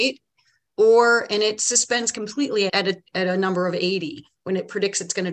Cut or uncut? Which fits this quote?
cut